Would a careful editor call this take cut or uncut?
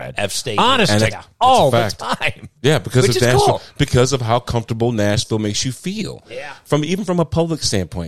cut